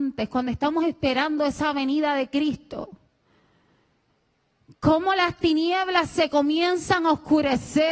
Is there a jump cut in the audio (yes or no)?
no